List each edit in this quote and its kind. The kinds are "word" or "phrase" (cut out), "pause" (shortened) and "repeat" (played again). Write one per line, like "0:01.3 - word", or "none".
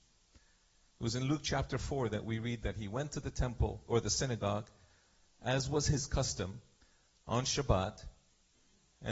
none